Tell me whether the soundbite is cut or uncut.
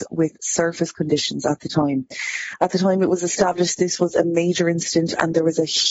uncut